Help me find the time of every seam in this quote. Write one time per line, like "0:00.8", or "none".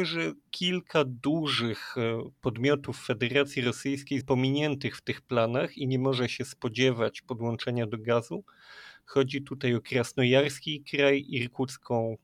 0:04.2